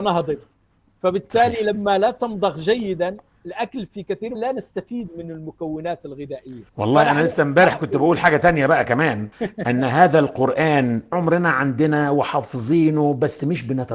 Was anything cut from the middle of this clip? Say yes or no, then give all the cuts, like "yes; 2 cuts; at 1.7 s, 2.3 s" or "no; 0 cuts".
yes; 4 cuts; at 4.3 s, 6.7 s, 9.3 s, 11.1 s